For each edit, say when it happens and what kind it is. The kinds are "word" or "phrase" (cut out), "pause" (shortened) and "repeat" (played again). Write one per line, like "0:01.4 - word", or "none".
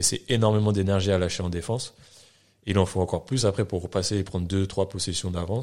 none